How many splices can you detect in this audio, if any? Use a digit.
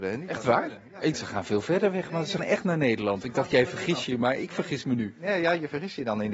2